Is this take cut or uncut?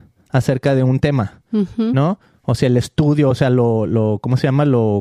uncut